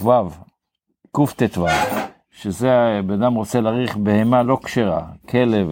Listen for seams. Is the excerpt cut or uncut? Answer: uncut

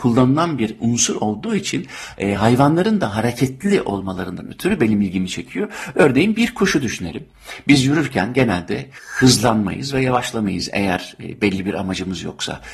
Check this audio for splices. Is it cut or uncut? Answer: uncut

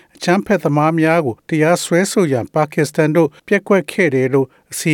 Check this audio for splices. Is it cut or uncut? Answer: cut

